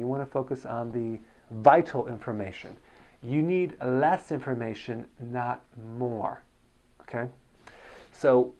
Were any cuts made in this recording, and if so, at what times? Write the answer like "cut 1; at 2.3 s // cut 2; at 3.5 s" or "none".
none